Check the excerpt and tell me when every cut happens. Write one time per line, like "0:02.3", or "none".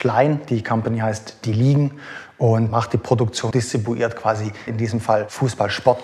0:03.5
0:04.7